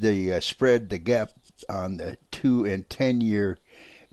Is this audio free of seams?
no; 1 cut; at 2.3 s

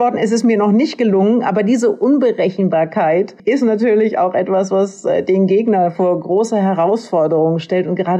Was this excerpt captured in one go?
yes; 0 cuts

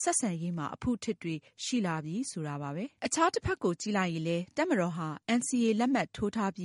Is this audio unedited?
no; 1 cut; at 3.0 s

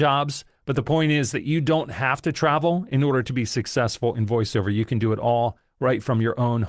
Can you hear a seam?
no; 0 cuts

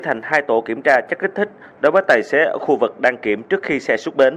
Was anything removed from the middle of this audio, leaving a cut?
no; 0 cuts

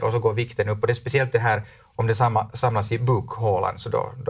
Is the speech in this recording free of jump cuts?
yes; 0 cuts

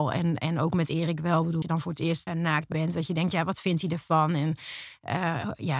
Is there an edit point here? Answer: yes; 3 cuts; at 1.6 s, 2.3 s, 2.7 s

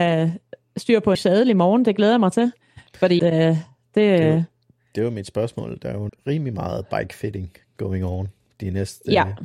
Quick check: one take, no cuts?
no; 3 cuts; at 1.1 s, 3.2 s, 6.1 s

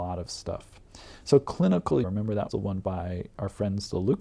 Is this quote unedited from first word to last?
no; 3 cuts; at 2.0 s, 2.5 s, 2.8 s

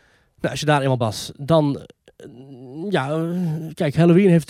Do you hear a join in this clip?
yes; 1 cut; at 1.0 s

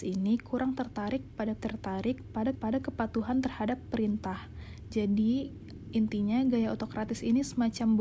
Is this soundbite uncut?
no; 2 cuts; at 1.6 s, 2.5 s

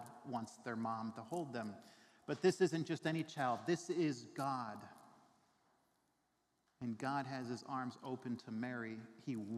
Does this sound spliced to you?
no; 0 cuts

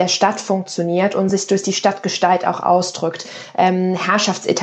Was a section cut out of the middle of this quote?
no; 0 cuts

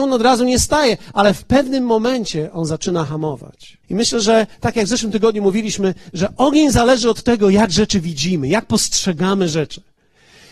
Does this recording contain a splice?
yes; 1 cut; at 3.8 s

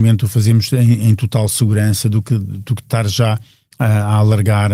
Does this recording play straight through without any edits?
yes; 0 cuts

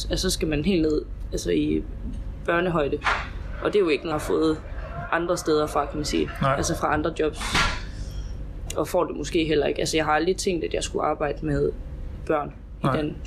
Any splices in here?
yes; 1 cut; at 4.1 s

